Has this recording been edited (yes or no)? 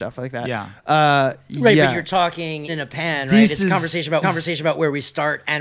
yes